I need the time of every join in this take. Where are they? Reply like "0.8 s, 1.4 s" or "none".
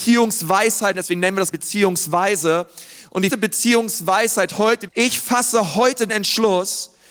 0.9 s, 1.5 s, 3.3 s, 4.9 s, 6.1 s